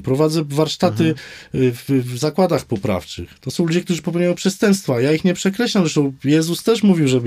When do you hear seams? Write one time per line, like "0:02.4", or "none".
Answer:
none